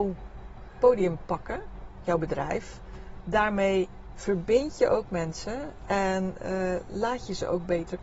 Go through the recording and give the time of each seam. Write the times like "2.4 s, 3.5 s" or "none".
none